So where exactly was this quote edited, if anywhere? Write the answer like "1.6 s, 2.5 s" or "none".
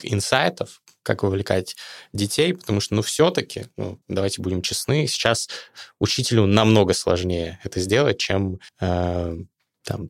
4.0 s, 8.7 s